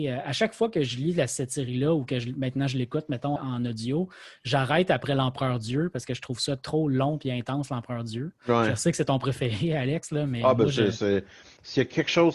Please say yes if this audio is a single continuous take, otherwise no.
no